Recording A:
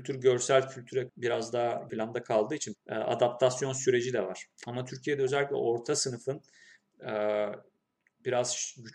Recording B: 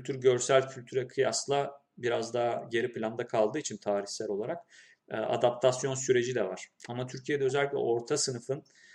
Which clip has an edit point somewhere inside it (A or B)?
A